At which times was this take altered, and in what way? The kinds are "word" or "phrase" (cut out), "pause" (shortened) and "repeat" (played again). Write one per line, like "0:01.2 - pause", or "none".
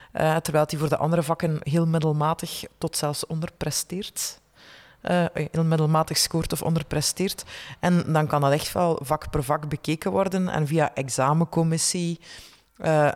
0:01.6 - word

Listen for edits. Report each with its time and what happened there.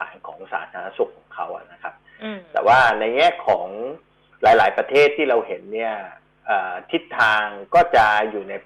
none

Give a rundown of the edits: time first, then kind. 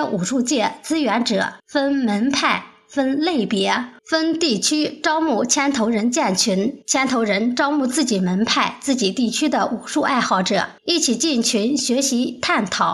0:01.6 - pause
0:04.0 - pause
0:06.8 - pause
0:10.8 - pause

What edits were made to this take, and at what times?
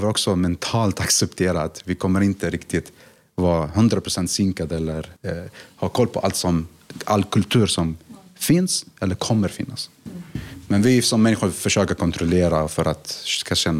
0:05.2 - pause

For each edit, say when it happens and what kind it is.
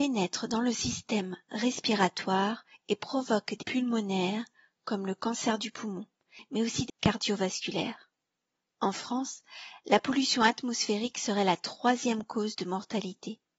0:03.6 - word
0:06.9 - word

